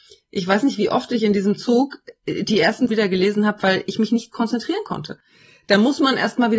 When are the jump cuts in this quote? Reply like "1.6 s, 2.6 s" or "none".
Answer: 2.9 s

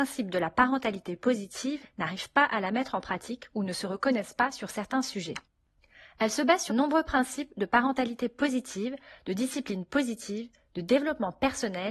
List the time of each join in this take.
1.8 s, 6.7 s

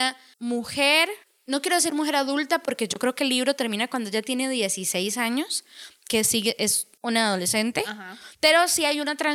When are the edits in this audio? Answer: 1.2 s, 8.3 s

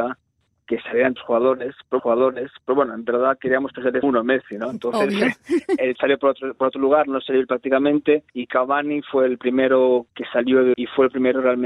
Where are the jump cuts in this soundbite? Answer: 1.2 s, 2.0 s, 4.0 s, 5.9 s, 8.3 s, 10.7 s

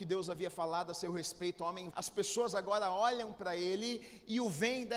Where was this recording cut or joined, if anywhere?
1.9 s

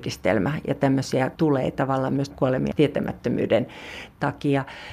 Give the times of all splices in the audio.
1.4 s, 2.3 s, 2.7 s

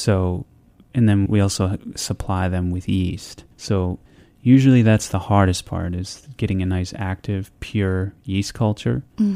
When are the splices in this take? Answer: 1.3 s, 3.5 s

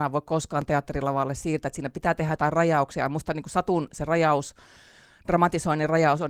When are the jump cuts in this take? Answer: none

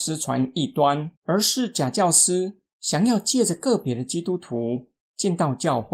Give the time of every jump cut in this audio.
1.1 s

